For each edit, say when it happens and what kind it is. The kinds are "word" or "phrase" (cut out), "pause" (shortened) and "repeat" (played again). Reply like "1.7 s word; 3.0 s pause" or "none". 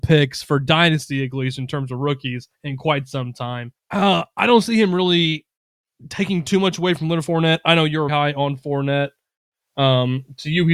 2.5 s pause; 3.8 s pause; 8.1 s word